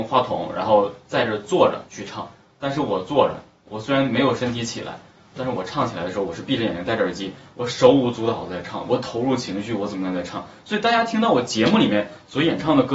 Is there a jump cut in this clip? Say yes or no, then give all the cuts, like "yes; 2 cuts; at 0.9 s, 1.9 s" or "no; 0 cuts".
no; 0 cuts